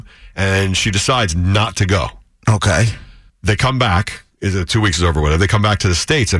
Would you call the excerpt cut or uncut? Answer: cut